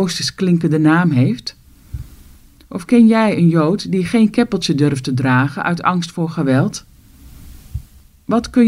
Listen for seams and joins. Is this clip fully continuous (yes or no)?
yes